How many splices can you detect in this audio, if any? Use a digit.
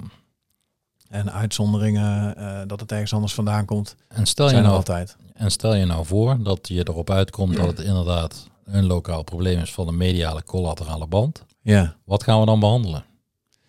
2